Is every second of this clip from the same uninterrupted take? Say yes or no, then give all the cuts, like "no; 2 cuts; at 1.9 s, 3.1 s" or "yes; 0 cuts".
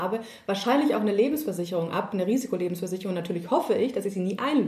yes; 0 cuts